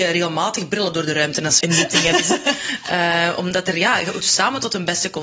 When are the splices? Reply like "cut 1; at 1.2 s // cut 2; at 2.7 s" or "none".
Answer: cut 1; at 1.6 s // cut 2; at 4.2 s